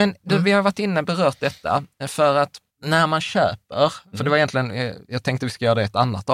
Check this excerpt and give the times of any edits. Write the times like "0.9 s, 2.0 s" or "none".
2.7 s